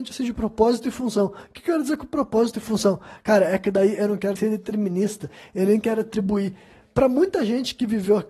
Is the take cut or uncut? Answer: cut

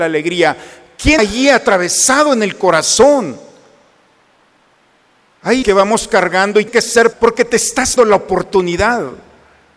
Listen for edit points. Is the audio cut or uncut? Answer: cut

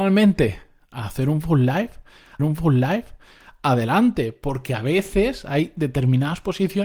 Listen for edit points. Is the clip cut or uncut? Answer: cut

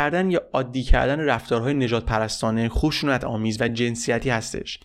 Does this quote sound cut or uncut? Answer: uncut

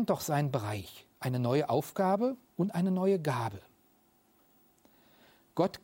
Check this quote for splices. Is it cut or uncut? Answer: cut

